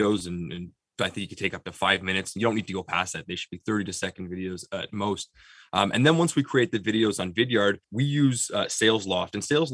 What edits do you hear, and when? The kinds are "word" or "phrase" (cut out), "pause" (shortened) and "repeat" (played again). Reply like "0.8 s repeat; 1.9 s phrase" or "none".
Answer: 7.8 s pause